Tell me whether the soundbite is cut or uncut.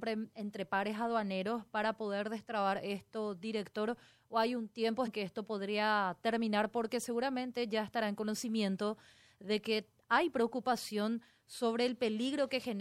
cut